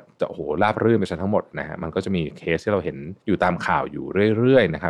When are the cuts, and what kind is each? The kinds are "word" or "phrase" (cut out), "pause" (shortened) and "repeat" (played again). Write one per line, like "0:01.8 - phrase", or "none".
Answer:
0:03.2 - pause